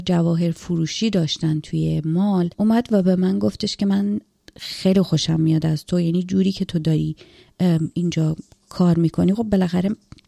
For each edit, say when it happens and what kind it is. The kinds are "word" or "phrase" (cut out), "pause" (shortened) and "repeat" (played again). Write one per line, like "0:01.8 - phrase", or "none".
0:02.5 - pause